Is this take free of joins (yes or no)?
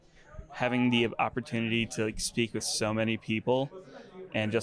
yes